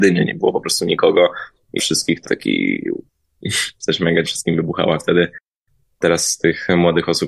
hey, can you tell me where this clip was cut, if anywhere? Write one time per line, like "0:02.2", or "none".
0:01.8
0:02.2
0:03.8
0:04.3
0:05.0